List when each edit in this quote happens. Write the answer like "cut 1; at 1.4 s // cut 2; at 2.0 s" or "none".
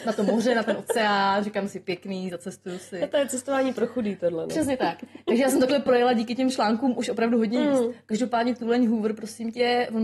none

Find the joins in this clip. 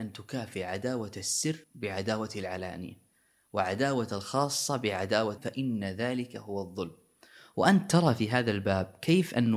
cut 1; at 1.6 s // cut 2; at 5.4 s

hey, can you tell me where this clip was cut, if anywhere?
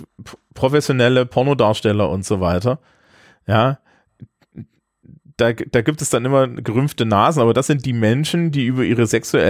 none

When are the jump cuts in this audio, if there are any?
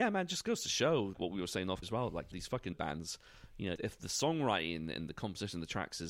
cut 1; at 1.1 s // cut 2; at 1.8 s // cut 3; at 2.3 s // cut 4; at 2.7 s // cut 5; at 3.8 s

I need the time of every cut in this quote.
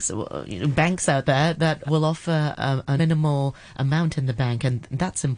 cut 1; at 1.9 s // cut 2; at 2.5 s // cut 3; at 3.0 s

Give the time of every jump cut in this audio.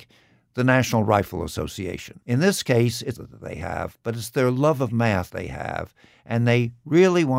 cut 1; at 2.2 s // cut 2; at 3.2 s // cut 3; at 5.3 s

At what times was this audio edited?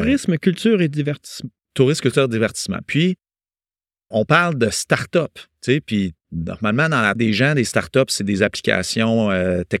cut 1; at 4.1 s // cut 2; at 6.2 s // cut 3; at 7.2 s

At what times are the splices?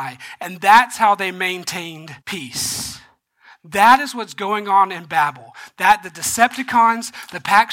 cut 1; at 2.2 s

